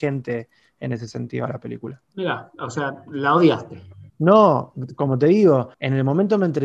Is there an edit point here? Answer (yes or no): yes